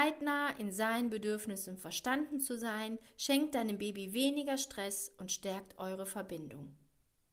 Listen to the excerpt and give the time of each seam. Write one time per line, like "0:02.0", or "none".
none